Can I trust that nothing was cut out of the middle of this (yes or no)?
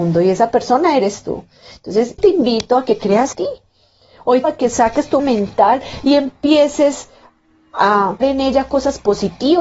no